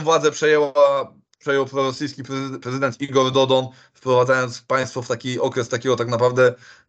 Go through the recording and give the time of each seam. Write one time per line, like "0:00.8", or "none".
none